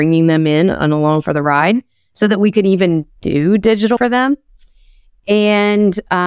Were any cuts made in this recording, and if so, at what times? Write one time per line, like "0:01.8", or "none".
0:03.2
0:04.0